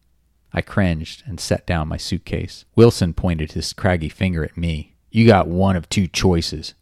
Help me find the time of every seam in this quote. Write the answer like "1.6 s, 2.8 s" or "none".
2.7 s, 5.0 s